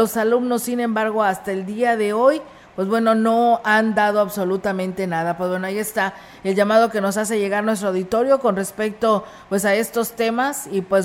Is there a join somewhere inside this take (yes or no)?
no